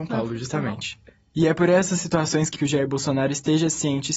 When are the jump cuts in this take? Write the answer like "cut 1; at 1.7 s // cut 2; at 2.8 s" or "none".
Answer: cut 1; at 2.6 s